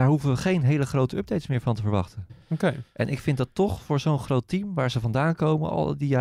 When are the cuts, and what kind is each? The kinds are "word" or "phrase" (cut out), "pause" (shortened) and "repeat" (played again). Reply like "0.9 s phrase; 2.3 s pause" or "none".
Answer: none